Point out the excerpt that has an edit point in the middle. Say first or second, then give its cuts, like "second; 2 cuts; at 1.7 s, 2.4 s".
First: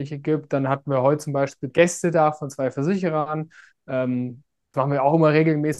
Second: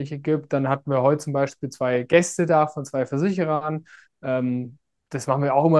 first; 2 cuts; at 1.7 s, 4.7 s